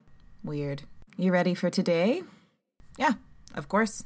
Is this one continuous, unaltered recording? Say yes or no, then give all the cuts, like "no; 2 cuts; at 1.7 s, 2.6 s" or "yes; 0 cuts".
no; 1 cut; at 1.1 s